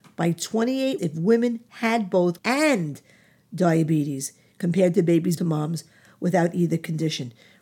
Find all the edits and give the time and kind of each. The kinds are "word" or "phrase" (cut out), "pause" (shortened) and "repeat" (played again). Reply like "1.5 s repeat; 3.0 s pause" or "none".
1.0 s word; 2.4 s word; 5.4 s word